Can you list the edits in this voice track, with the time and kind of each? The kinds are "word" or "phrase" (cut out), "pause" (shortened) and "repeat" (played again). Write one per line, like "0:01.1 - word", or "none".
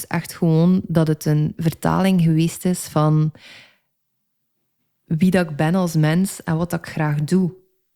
none

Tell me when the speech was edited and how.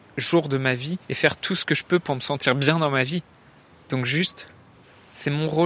0:01.0 - pause

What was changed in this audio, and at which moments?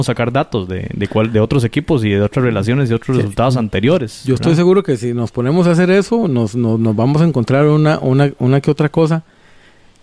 none

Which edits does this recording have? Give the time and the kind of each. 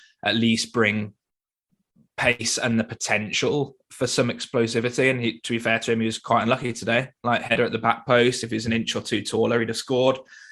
none

